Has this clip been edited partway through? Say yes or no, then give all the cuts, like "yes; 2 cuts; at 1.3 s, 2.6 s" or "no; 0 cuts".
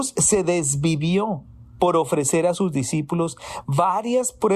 no; 0 cuts